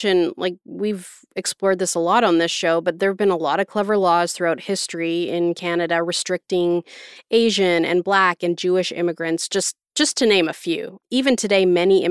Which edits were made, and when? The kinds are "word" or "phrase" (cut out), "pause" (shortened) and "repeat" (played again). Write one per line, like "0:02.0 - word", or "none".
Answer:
0:11.0 - word